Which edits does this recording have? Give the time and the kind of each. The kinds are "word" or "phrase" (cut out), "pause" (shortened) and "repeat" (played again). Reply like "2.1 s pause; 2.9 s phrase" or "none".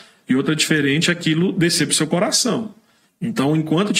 none